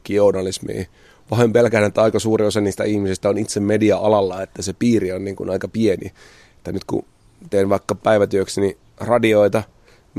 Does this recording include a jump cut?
no; 0 cuts

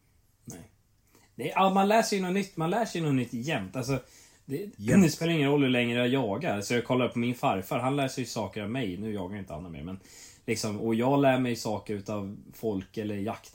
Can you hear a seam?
no; 0 cuts

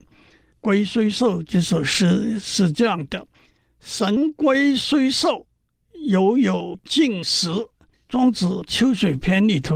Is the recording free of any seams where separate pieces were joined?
no; 2 cuts; at 3.3 s, 7.9 s

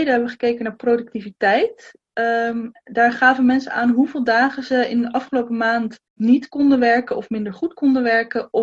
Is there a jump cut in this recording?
yes; 1 cut; at 6.1 s

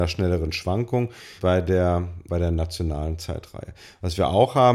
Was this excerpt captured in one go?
no; 2 cuts; at 1.4 s, 2.3 s

